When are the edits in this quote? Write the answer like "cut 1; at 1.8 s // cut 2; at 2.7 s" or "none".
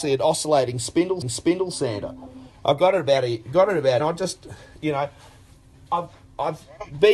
cut 1; at 1.2 s // cut 2; at 4.0 s